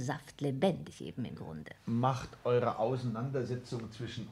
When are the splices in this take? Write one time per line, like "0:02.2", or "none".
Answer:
none